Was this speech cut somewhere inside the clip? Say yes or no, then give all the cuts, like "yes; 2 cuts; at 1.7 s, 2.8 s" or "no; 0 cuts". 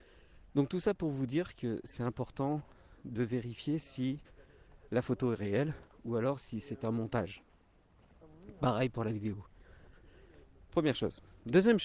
no; 0 cuts